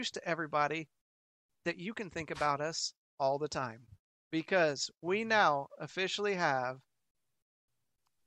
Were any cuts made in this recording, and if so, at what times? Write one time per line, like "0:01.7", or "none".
none